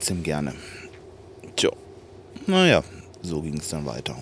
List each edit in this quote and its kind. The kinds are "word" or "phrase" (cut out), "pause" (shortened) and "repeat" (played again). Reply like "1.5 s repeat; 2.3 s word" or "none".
none